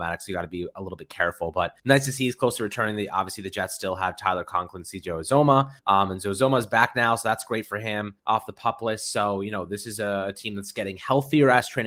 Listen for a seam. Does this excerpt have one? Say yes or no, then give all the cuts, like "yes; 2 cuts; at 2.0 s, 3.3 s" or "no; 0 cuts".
yes; 3 cuts; at 1.8 s, 5.8 s, 8.2 s